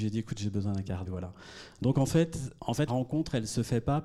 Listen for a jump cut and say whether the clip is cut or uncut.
cut